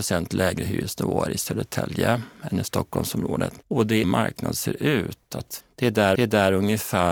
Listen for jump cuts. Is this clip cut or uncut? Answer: cut